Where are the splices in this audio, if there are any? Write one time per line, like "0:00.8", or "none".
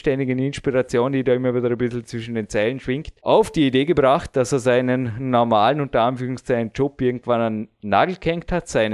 0:03.2